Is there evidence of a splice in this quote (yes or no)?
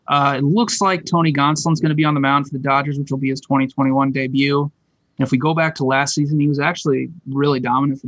no